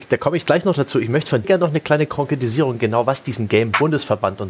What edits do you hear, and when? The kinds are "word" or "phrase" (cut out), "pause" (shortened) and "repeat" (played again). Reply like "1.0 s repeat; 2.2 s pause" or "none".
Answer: 1.4 s word